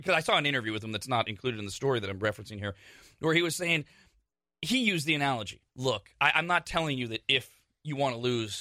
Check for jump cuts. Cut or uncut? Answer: cut